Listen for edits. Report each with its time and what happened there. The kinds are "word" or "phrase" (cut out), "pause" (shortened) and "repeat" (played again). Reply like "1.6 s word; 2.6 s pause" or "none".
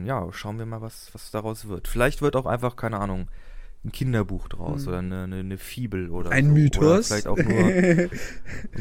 none